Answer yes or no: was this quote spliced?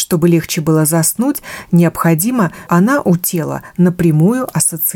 yes